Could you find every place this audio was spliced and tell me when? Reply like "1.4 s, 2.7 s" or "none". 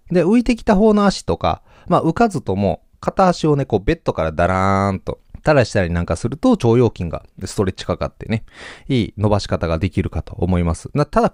5.3 s